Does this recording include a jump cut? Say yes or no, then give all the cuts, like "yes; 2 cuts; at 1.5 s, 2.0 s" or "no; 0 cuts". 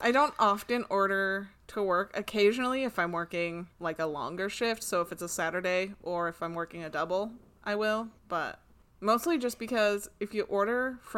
yes; 2 cuts; at 3.7 s, 8.2 s